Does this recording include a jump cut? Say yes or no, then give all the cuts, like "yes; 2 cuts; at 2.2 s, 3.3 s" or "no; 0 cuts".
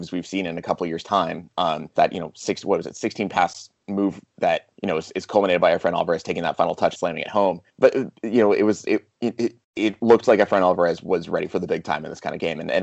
yes; 6 cuts; at 2.0 s, 4.7 s, 6.9 s, 7.7 s, 9.1 s, 9.6 s